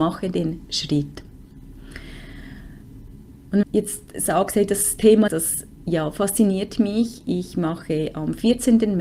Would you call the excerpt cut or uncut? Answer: cut